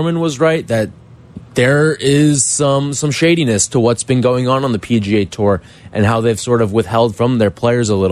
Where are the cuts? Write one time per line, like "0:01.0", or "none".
none